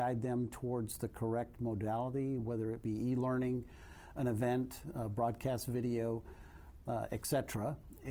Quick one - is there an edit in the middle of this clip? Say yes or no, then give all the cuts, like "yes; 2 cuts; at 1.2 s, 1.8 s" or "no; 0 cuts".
no; 0 cuts